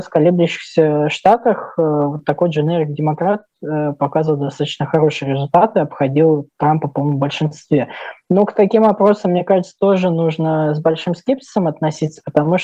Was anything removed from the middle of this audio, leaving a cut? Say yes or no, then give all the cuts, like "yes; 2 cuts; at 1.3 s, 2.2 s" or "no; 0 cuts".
no; 0 cuts